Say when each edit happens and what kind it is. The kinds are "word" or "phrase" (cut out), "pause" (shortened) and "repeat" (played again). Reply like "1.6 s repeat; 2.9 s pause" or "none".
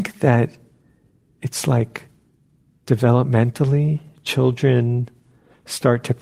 none